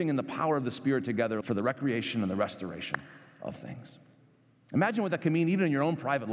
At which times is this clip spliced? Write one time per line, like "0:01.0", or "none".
0:01.4
0:03.5